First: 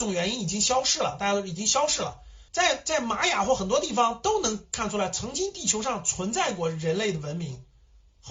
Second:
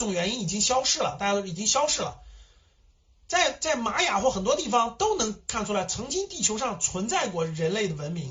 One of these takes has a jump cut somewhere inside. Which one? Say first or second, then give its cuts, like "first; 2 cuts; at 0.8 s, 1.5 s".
first; 1 cut; at 2.5 s